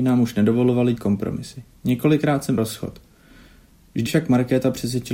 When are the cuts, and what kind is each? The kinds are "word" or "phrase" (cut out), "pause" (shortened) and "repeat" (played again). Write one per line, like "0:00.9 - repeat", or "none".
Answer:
0:01.0 - word
0:02.6 - word
0:04.1 - word